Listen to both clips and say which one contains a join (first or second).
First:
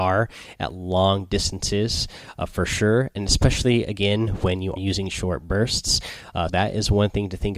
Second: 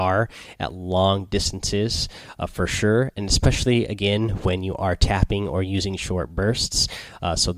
first